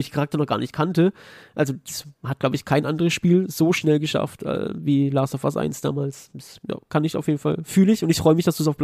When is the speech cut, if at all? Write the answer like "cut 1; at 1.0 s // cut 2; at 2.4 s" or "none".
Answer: none